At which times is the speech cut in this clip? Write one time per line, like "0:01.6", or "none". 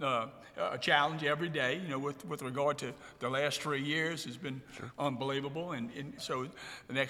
0:06.2